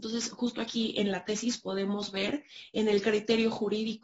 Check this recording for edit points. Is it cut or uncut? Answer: uncut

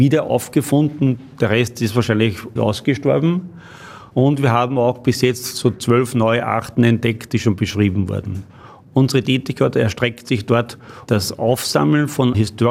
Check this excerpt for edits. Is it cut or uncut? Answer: uncut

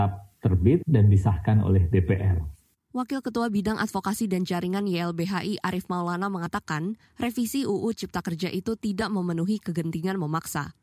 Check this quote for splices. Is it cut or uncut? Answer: uncut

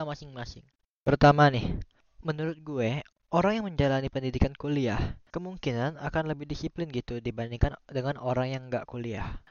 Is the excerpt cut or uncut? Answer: uncut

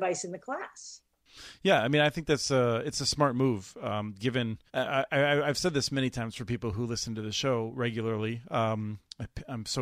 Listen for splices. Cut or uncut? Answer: cut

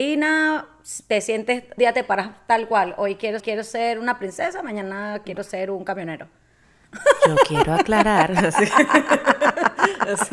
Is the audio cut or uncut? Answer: cut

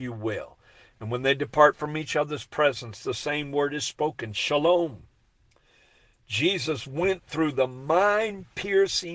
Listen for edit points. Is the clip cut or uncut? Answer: uncut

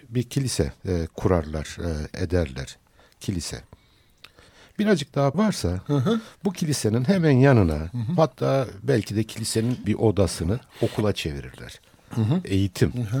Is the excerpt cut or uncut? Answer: cut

